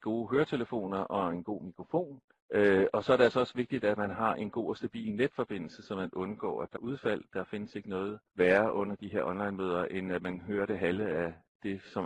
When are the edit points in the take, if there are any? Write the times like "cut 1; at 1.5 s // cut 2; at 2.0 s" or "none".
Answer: cut 1; at 2.3 s // cut 2; at 5.8 s // cut 3; at 6.8 s // cut 4; at 8.3 s